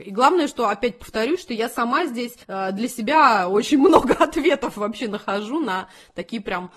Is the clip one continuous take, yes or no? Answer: no